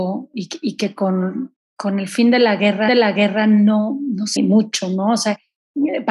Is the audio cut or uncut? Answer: cut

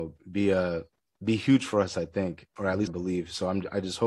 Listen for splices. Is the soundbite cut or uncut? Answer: cut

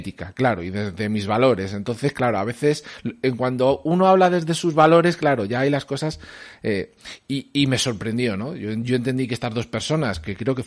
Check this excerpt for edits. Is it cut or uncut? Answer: uncut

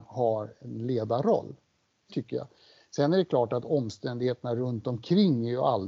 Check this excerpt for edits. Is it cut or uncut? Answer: cut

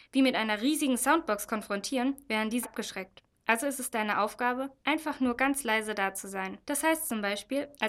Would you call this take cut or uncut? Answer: cut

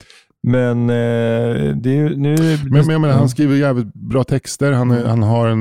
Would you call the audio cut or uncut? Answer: uncut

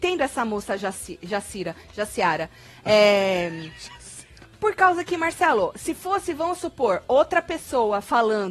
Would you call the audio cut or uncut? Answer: uncut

